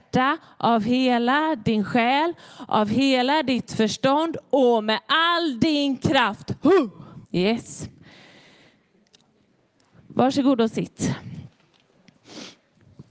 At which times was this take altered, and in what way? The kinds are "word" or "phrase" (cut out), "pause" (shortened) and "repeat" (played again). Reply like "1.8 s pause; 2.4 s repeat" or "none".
7.2 s pause